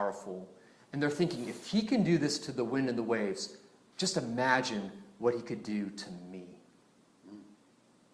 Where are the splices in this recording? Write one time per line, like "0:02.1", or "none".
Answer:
none